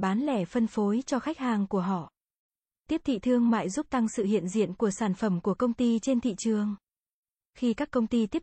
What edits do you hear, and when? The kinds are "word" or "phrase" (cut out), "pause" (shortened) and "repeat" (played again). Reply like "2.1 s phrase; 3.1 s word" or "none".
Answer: none